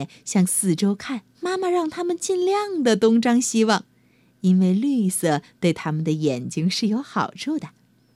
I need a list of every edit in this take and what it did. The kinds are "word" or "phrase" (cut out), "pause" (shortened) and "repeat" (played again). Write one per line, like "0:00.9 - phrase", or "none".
0:01.3 - pause